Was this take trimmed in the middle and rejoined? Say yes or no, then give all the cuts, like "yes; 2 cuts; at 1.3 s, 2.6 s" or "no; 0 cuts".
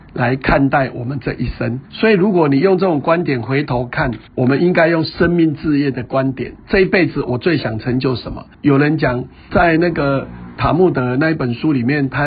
yes; 5 cuts; at 1.9 s, 4.3 s, 6.6 s, 8.5 s, 9.5 s